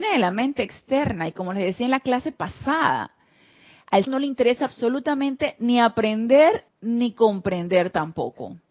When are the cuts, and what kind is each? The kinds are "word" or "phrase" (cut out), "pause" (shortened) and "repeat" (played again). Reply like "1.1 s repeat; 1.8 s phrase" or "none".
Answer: 4.1 s phrase; 6.7 s pause

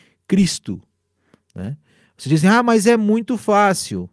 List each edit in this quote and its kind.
none

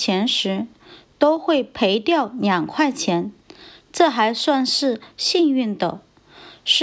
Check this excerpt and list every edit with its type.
none

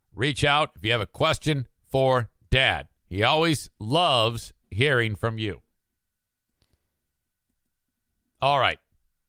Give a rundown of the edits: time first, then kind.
2.9 s pause

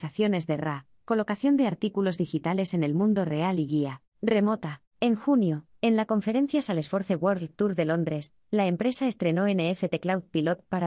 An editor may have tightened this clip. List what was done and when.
4.9 s pause

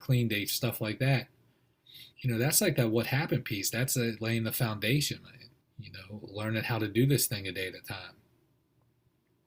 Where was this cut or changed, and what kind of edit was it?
2.1 s pause; 5.6 s pause

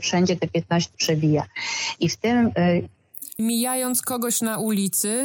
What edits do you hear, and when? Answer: 0.9 s word; 3.4 s word

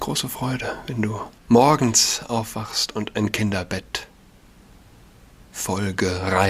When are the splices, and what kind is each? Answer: 1.4 s pause

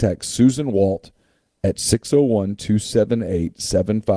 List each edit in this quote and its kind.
none

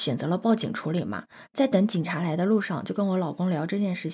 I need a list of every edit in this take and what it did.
none

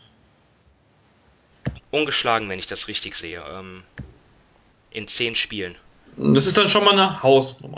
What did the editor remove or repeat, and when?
none

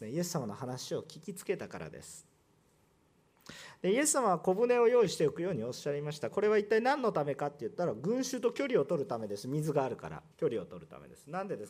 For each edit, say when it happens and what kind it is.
10.3 s pause

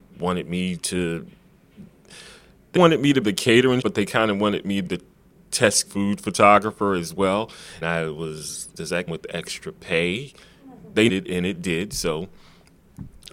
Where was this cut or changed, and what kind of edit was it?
2.8 s word; 3.2 s word; 3.8 s word; 4.8 s word; 5.9 s word; 7.8 s word; 8.7 s word; 9.1 s word; 11.1 s word

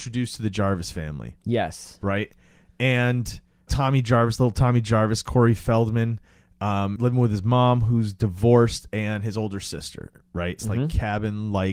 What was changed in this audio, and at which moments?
3.7 s word; 7.0 s word; 10.6 s word

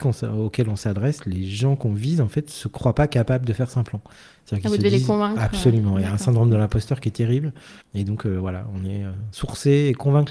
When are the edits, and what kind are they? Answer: 7.8 s pause

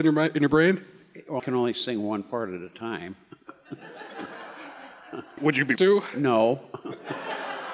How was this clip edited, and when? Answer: 1.4 s word; 5.4 s word; 5.8 s word

